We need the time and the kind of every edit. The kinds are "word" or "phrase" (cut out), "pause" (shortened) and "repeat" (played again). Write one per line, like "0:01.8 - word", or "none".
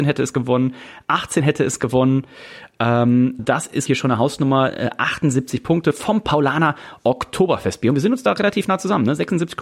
0:03.4 - word
0:03.9 - word